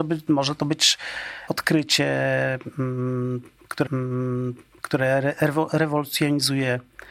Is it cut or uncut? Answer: cut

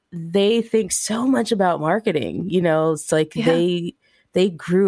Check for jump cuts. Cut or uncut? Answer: uncut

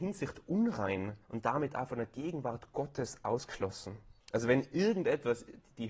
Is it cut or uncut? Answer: cut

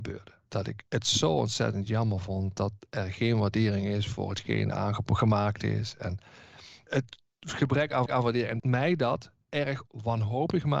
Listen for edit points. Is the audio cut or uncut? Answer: cut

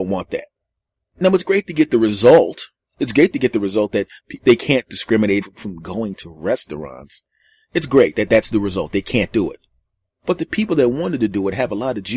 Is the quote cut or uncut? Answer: cut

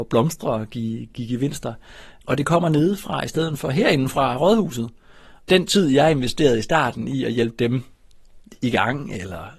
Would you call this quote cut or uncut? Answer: uncut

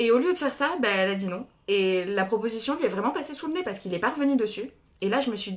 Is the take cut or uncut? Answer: uncut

